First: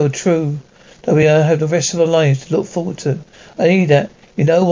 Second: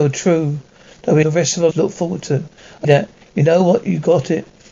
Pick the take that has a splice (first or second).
second